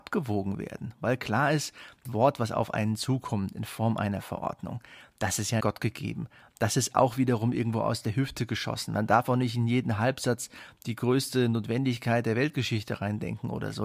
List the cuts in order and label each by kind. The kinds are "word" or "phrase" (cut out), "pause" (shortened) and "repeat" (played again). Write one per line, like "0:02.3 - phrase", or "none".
0:02.0 - word
0:05.6 - word